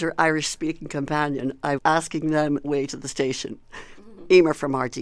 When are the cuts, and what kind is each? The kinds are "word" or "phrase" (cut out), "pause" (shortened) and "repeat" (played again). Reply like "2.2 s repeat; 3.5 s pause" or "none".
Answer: 1.8 s word; 2.6 s word

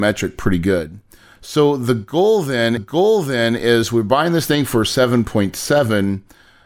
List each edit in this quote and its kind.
2.8 s repeat

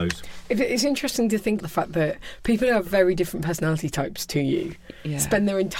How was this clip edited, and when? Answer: 1.6 s word

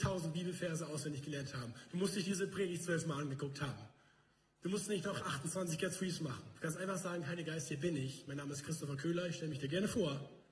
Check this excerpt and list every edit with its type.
none

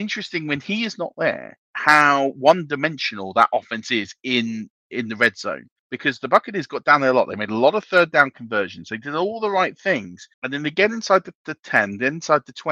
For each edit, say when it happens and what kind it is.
1.6 s pause; 5.8 s pause; 10.3 s pause

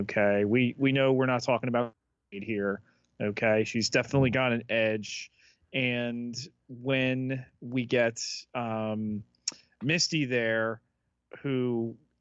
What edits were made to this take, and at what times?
none

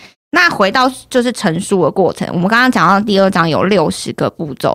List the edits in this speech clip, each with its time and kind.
none

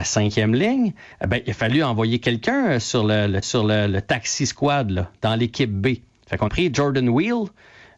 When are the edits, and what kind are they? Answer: 1.1 s pause; 3.4 s repeat; 6.5 s word

